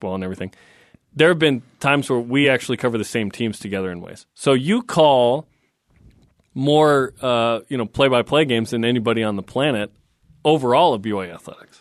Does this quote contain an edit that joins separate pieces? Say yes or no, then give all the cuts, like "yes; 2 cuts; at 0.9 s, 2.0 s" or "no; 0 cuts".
no; 0 cuts